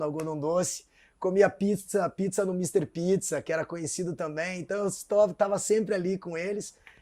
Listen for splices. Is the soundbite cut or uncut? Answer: uncut